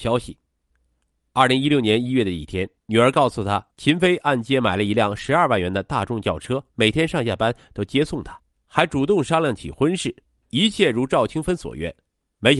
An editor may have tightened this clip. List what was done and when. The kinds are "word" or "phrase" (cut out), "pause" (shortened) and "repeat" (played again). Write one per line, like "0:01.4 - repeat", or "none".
0:02.8 - pause
0:03.7 - pause
0:06.7 - pause
0:08.6 - pause
0:10.3 - pause